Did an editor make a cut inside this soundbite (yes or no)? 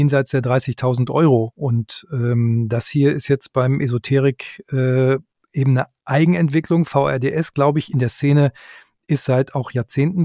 no